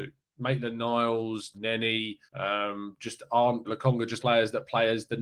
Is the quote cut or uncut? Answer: cut